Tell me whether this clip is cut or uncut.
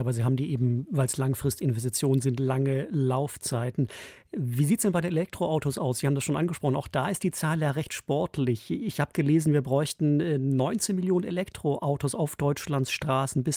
uncut